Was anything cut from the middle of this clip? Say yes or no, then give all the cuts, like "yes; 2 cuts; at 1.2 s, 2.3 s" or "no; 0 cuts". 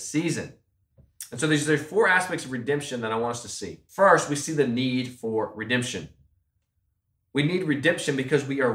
yes; 1 cut; at 3.9 s